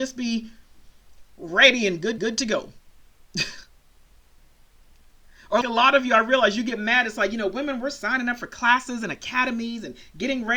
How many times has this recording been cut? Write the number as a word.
three